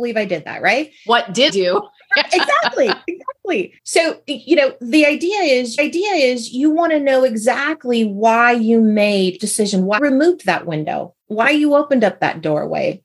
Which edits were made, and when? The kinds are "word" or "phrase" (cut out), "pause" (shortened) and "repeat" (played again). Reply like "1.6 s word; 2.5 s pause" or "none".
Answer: 1.5 s word; 3.8 s pause; 5.8 s repeat; 9.4 s word; 10.0 s word; 11.2 s pause